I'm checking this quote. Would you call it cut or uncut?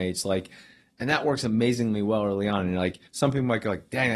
cut